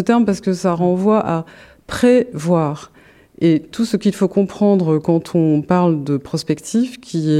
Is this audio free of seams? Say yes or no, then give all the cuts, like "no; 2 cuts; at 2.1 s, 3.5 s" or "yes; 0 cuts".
yes; 0 cuts